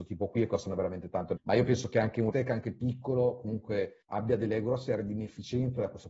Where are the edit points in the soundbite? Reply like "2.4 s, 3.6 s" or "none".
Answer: 1.4 s, 2.3 s, 4.0 s